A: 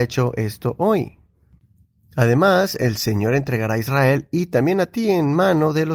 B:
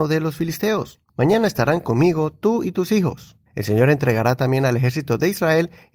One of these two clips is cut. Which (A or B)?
B